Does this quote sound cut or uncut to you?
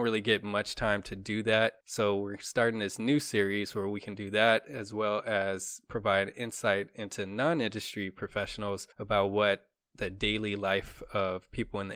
cut